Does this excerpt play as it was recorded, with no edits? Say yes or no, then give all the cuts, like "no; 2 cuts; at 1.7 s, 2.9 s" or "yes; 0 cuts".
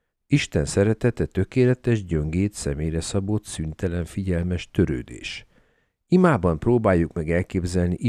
yes; 0 cuts